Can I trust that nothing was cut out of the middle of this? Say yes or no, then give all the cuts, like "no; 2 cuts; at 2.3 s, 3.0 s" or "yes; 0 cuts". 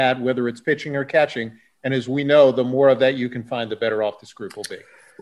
yes; 0 cuts